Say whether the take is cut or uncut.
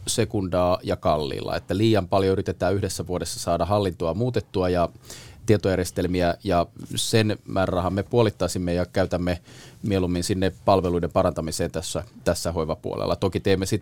uncut